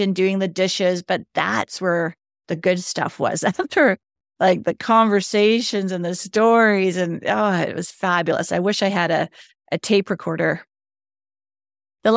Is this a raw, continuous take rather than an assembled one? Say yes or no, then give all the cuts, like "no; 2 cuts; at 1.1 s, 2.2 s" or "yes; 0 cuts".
yes; 0 cuts